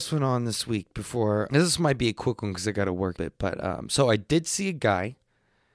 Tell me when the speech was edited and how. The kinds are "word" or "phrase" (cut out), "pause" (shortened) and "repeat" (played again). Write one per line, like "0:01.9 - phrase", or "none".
0:01.5 - word
0:03.2 - phrase